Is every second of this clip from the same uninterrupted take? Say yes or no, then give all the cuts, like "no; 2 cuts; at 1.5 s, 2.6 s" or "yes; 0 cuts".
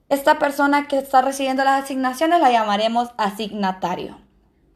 yes; 0 cuts